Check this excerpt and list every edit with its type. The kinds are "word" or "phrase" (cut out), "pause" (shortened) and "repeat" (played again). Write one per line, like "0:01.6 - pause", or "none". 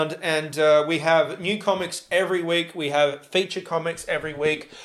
none